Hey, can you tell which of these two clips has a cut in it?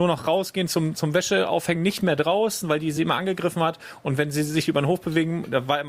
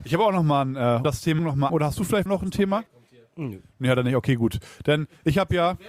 second; 5 cuts; at 1.0 s, 1.4 s, 1.7 s, 2.3 s, 2.9 s

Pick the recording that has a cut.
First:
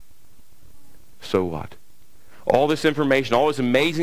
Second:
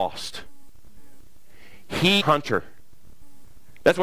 second; 1 cut; at 2.2 s

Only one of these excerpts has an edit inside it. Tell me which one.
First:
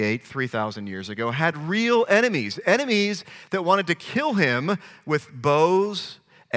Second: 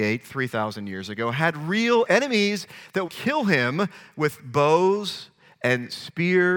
second; 2 cuts; at 2.1 s, 3.1 s

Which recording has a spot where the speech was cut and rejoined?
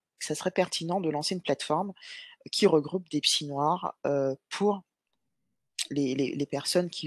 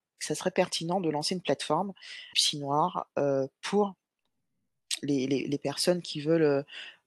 second; 1 cut; at 2.3 s

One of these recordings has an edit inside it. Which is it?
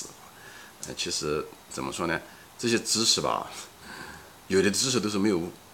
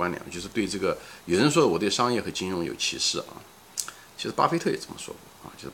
first; 1 cut; at 1.7 s

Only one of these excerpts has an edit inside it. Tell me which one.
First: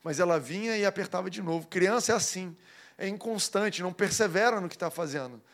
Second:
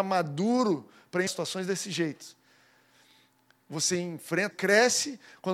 second; 2 cuts; at 1.3 s, 4.5 s

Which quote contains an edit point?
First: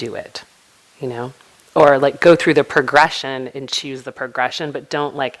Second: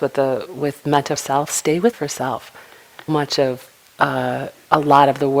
second; 3 cuts; at 1.2 s, 1.9 s, 3.1 s

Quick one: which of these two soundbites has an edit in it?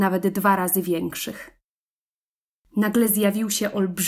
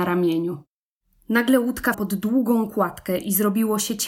second; 1 cut; at 1.9 s

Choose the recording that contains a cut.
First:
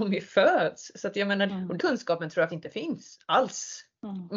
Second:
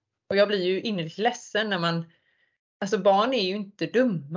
first; 3 cuts; at 1.5 s, 1.8 s, 2.5 s

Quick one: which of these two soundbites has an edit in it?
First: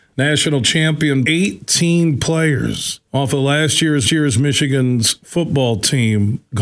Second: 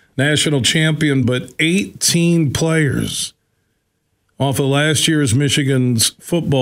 first; 3 cuts; at 1.2 s, 3.0 s, 4.0 s

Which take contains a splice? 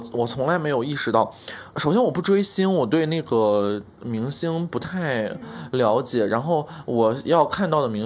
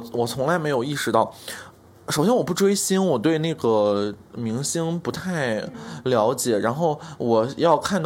first; 1 cut; at 1.7 s

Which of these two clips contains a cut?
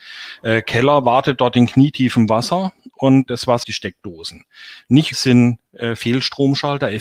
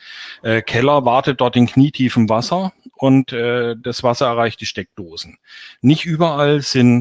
first; 3 cuts; at 3.3 s, 3.6 s, 5.1 s

